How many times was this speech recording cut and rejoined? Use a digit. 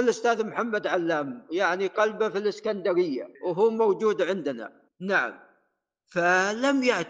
2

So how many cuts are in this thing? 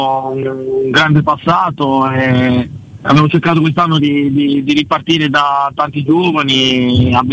1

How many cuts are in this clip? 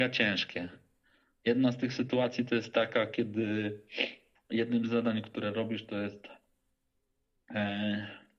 0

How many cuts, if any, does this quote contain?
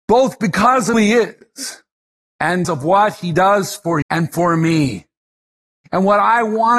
3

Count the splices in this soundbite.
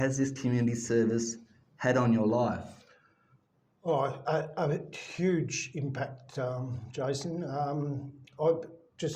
0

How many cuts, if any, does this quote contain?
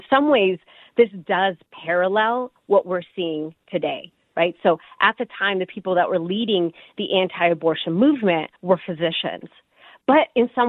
1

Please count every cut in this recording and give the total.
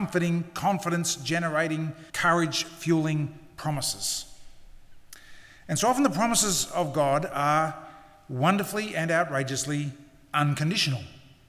1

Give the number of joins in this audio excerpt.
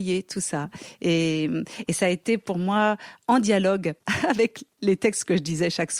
0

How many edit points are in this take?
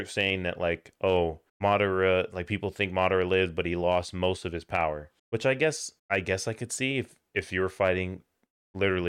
3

